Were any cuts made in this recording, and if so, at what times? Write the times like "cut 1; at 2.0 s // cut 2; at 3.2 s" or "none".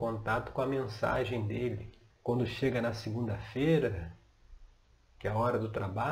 cut 1; at 2.1 s

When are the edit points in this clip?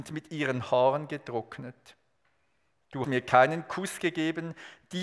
cut 1; at 3.0 s

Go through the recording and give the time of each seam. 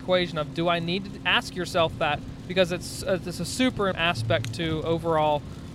cut 1; at 3.9 s

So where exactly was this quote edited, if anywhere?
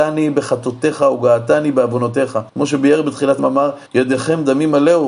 cut 1; at 2.5 s // cut 2; at 3.4 s // cut 3; at 3.9 s

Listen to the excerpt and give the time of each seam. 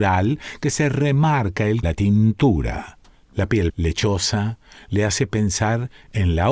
cut 1; at 1.8 s // cut 2; at 3.1 s // cut 3; at 3.7 s

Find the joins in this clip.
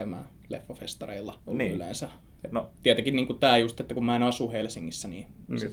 cut 1; at 1.4 s

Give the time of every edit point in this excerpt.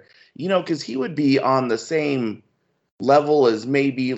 none

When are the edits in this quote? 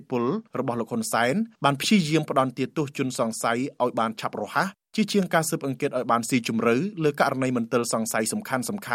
cut 1; at 1.5 s

